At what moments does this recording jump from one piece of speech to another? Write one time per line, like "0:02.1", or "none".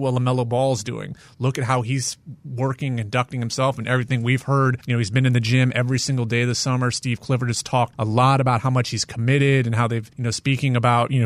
0:10.1